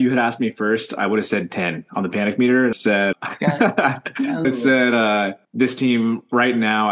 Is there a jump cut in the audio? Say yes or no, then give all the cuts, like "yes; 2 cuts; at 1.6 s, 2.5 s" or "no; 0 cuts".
yes; 4 cuts; at 2.7 s, 3.1 s, 4.4 s, 5.4 s